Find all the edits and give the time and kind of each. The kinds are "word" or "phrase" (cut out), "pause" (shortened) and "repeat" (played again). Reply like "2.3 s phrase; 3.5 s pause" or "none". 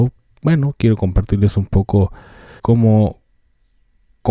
2.6 s word